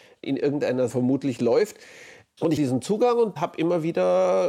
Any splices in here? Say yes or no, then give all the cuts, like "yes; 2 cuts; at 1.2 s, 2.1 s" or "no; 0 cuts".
yes; 2 cuts; at 0.9 s, 2.6 s